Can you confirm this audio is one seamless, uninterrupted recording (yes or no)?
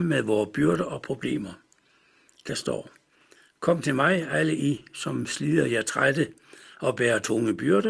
yes